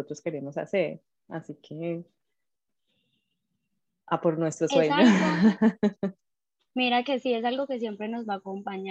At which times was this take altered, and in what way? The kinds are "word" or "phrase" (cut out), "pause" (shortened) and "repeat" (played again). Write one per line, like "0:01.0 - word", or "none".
none